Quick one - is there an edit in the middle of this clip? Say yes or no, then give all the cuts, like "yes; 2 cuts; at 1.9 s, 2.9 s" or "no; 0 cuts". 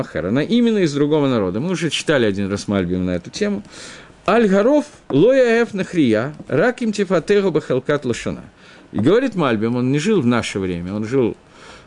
no; 0 cuts